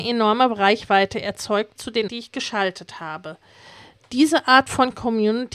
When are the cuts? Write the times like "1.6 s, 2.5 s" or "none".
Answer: 1.8 s, 2.1 s

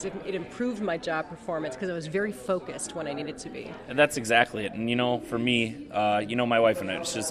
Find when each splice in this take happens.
none

